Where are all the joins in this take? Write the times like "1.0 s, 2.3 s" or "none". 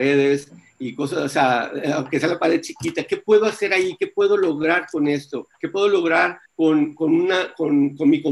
5.5 s, 6.4 s